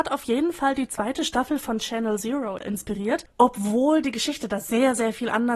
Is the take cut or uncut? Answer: uncut